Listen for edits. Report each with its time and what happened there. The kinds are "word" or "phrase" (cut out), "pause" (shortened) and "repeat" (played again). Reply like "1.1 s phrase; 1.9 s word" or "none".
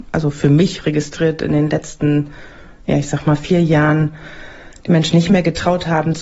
none